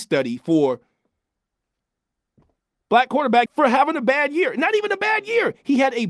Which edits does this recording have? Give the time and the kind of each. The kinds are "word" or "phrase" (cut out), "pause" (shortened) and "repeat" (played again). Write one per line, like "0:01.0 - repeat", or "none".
0:03.5 - phrase